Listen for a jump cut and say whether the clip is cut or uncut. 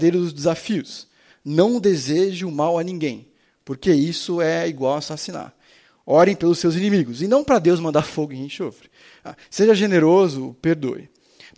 uncut